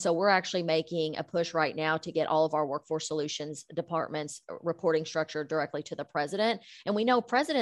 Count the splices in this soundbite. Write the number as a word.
zero